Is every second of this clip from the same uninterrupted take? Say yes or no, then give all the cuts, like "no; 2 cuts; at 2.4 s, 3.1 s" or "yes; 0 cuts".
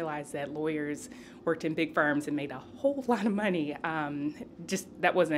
yes; 0 cuts